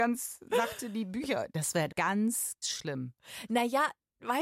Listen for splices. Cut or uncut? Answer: cut